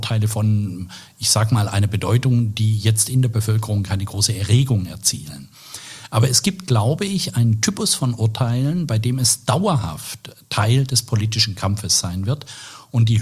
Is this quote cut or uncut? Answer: uncut